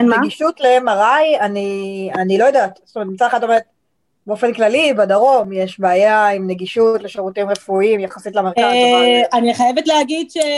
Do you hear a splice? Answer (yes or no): no